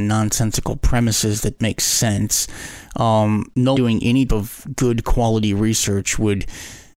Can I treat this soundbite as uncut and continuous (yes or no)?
no